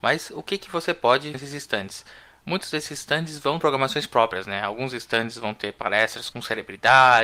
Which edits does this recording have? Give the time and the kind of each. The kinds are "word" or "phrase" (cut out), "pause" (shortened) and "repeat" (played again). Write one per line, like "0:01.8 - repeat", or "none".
0:01.3 - word
0:03.6 - word
0:06.3 - word